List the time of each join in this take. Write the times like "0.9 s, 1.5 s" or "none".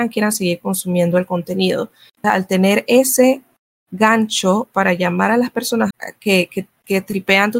2.2 s, 5.9 s

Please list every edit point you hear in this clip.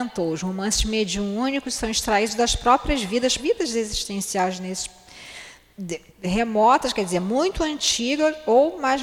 3.4 s, 6.1 s

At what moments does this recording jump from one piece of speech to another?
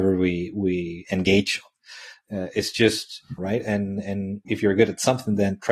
3.4 s

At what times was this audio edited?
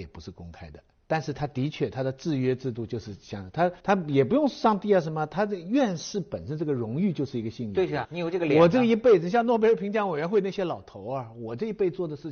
3.8 s, 8.0 s

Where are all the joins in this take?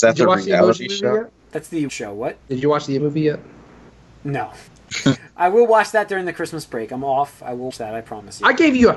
1.4 s, 1.9 s, 2.4 s, 3.0 s, 4.7 s, 7.7 s

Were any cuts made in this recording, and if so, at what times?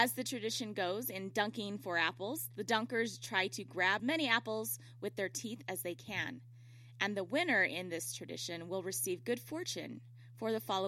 4.0 s

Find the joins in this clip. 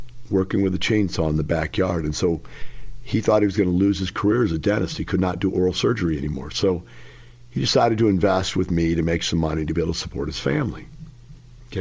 none

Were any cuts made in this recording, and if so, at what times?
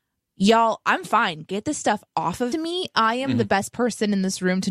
2.5 s

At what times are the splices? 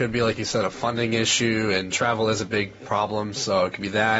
none

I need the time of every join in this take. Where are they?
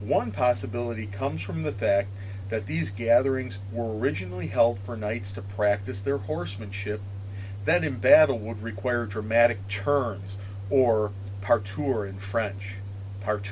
none

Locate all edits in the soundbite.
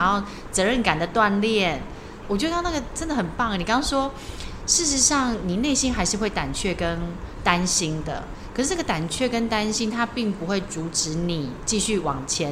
2.2 s

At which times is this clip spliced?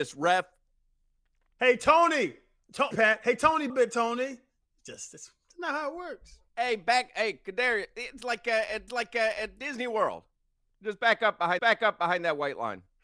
2.9 s, 3.7 s, 8.9 s, 11.6 s

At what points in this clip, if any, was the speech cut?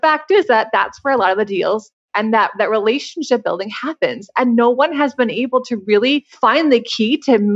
none

